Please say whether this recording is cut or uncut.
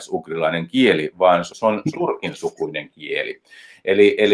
cut